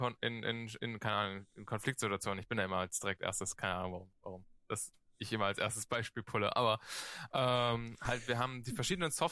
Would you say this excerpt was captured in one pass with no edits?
yes; 0 cuts

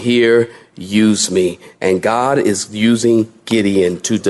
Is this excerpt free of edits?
yes; 0 cuts

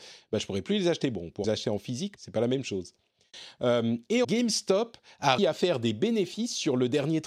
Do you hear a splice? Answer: yes; 4 cuts; at 1.4 s, 2.2 s, 4.2 s, 5.4 s

